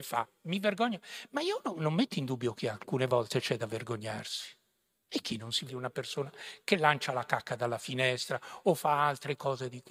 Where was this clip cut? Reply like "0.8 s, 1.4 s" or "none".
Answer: 5.7 s